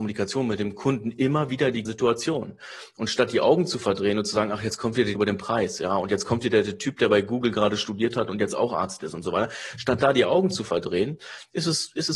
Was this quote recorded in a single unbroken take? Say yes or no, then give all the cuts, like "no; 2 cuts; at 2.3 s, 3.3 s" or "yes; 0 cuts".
no; 2 cuts; at 1.9 s, 5.2 s